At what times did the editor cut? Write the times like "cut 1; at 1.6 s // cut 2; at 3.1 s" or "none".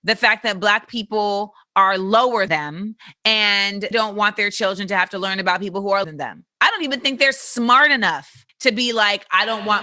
cut 1; at 2.5 s // cut 2; at 3.9 s // cut 3; at 6.0 s // cut 4; at 6.5 s // cut 5; at 8.5 s

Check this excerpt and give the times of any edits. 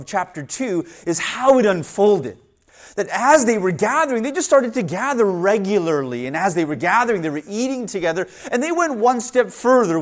none

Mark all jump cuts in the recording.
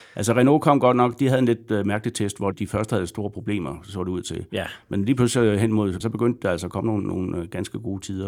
cut 1; at 2.5 s // cut 2; at 6.0 s

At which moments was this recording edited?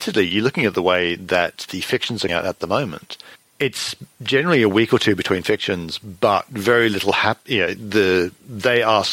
cut 1; at 2.3 s

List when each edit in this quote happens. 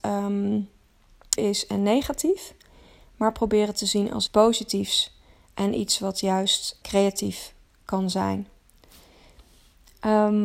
cut 1; at 1.4 s // cut 2; at 4.3 s // cut 3; at 6.8 s

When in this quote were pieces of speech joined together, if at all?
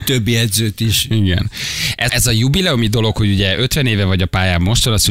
cut 1; at 2.1 s

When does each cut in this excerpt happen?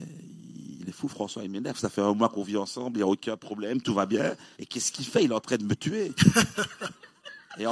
cut 1; at 4.5 s

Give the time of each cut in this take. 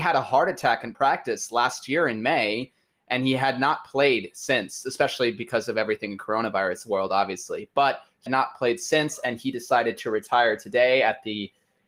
cut 1; at 8.3 s

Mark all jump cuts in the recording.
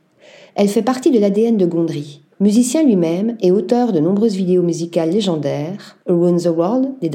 cut 1; at 2.3 s // cut 2; at 6.0 s

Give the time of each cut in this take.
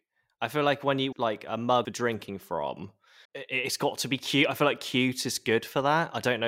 cut 1; at 1.1 s // cut 2; at 1.8 s // cut 3; at 3.2 s

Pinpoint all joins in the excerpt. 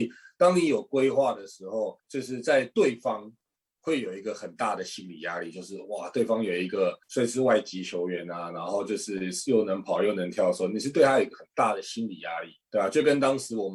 cut 1; at 2.0 s // cut 2; at 7.0 s // cut 3; at 12.6 s

